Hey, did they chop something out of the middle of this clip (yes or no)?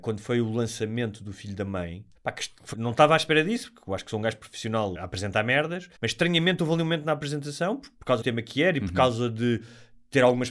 yes